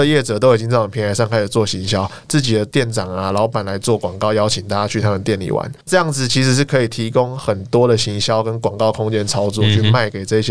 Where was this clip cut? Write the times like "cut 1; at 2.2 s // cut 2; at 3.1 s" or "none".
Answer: cut 1; at 5.8 s